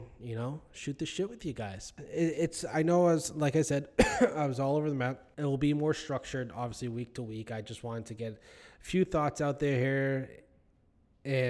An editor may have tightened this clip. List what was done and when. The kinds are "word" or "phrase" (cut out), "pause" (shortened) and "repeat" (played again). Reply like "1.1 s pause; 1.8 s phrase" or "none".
5.3 s pause